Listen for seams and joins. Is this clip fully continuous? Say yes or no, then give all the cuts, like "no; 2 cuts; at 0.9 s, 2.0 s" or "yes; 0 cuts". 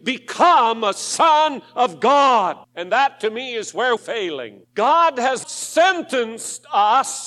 no; 4 cuts; at 2.6 s, 4.0 s, 4.6 s, 5.4 s